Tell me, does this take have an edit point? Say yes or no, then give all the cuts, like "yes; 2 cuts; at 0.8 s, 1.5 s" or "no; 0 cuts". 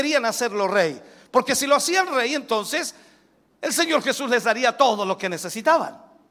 no; 0 cuts